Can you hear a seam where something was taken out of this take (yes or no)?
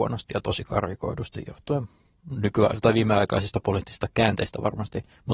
no